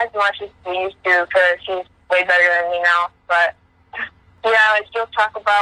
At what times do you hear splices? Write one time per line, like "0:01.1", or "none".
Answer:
none

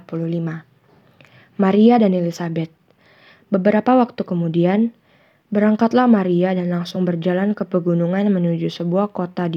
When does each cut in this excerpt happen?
none

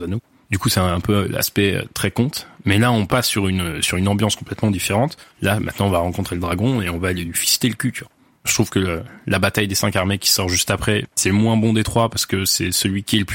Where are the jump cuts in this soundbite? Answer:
none

